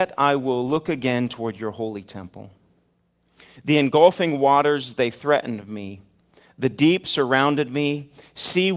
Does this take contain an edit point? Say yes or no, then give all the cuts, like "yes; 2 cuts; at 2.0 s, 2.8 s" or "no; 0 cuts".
no; 0 cuts